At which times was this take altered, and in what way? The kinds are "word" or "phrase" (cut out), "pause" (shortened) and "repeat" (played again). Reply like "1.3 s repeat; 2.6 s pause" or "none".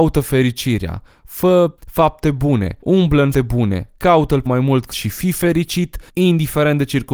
1.8 s pause; 2.8 s pause; 3.3 s word; 4.5 s word; 4.9 s word; 6.1 s pause